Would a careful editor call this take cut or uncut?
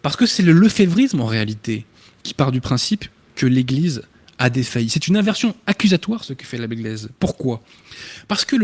uncut